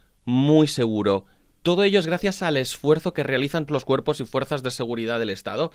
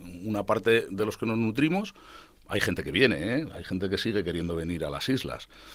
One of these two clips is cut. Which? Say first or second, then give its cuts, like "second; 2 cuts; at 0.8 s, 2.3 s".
first; 1 cut; at 3.7 s